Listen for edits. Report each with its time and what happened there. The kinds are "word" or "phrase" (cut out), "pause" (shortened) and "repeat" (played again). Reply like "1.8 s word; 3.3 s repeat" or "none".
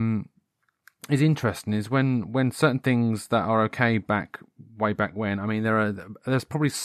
none